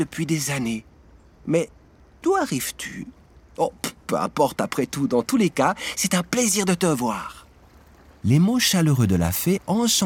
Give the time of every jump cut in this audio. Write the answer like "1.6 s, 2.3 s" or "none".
none